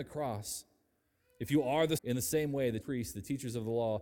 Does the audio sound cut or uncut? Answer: cut